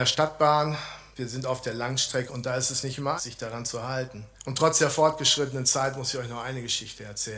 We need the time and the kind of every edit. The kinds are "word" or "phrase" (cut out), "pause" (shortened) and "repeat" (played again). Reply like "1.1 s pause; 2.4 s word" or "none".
1.1 s pause; 2.3 s word; 3.2 s word; 4.3 s pause